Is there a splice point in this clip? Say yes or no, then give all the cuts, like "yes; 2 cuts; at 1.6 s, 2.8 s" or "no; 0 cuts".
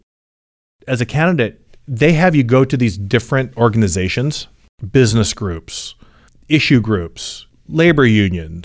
no; 0 cuts